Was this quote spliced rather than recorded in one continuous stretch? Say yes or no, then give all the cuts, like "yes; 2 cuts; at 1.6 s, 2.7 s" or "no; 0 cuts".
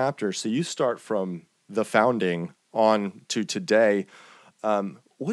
no; 0 cuts